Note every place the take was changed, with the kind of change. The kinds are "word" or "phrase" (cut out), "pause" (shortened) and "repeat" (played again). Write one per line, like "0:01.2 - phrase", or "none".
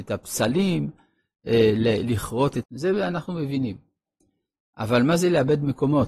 0:02.6 - word